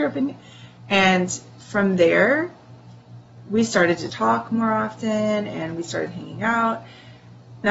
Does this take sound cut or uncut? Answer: cut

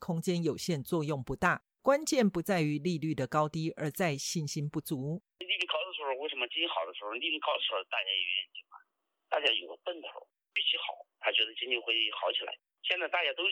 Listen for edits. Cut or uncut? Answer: uncut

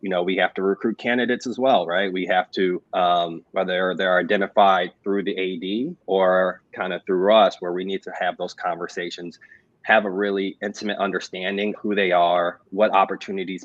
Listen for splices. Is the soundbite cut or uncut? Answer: cut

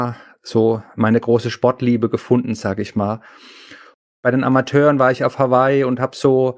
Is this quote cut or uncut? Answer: uncut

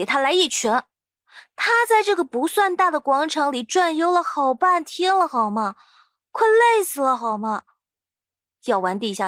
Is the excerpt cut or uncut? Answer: uncut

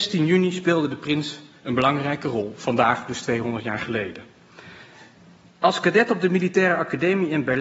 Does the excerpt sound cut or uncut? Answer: uncut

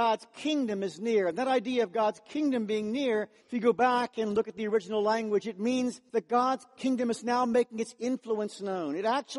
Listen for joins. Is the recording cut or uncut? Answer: cut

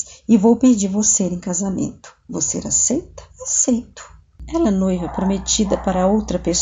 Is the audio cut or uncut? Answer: cut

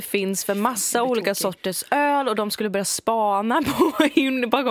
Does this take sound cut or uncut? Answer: uncut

